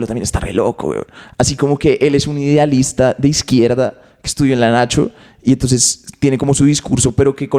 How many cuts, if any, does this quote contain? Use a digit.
0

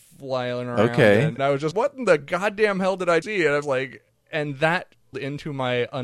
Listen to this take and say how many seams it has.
5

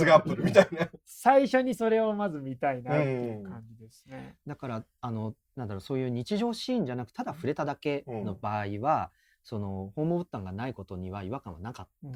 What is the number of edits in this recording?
1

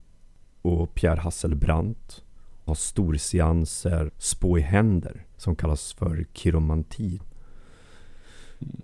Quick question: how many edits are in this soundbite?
4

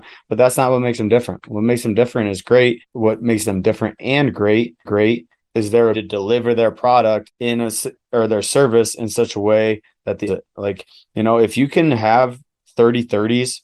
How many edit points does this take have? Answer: 3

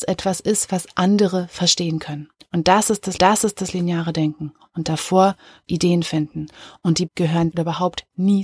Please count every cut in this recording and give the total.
5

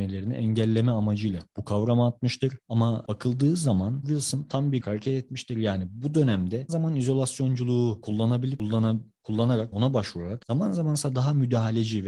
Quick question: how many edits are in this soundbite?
4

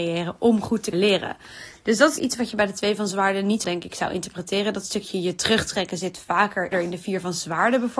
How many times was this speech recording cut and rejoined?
4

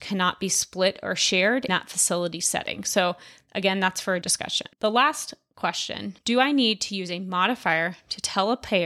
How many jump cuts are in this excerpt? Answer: 4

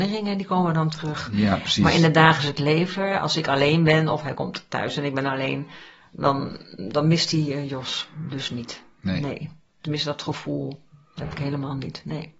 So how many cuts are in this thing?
0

